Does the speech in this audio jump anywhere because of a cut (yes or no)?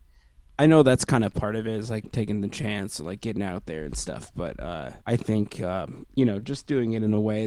yes